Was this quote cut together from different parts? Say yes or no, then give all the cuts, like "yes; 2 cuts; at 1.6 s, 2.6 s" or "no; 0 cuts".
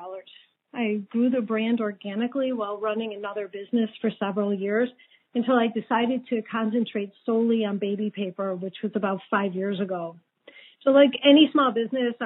no; 0 cuts